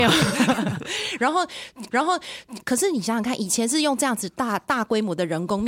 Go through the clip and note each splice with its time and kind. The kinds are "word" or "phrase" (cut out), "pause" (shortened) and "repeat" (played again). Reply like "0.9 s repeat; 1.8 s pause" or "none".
1.9 s repeat